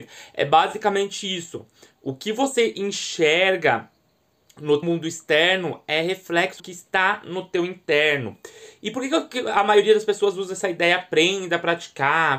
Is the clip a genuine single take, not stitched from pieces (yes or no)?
no